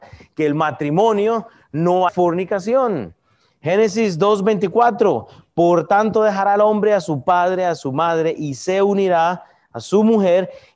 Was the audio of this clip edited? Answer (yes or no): yes